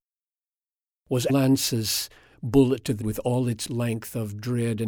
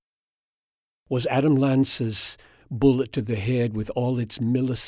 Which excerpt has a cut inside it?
first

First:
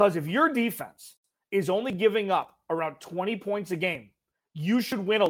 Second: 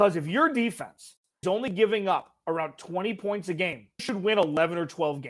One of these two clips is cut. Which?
second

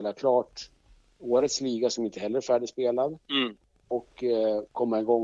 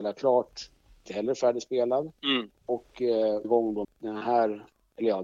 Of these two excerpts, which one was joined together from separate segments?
second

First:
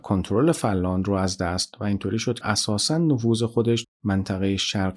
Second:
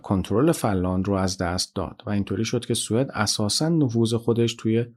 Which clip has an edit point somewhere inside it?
first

